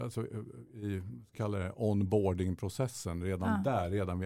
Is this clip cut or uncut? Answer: cut